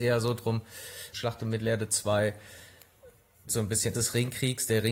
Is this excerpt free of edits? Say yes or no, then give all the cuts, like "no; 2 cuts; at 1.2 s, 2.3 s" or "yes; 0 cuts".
no; 3 cuts; at 1.1 s, 3.5 s, 3.9 s